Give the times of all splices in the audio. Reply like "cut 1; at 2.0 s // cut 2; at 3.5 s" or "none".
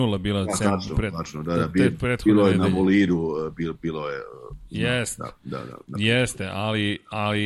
none